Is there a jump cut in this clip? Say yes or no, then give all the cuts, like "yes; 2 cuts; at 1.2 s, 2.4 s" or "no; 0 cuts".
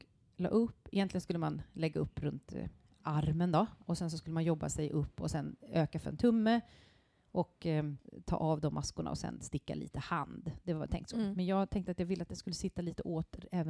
no; 0 cuts